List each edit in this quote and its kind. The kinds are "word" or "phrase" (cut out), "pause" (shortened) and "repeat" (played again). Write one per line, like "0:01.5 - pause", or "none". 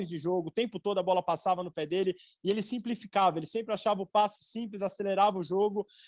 none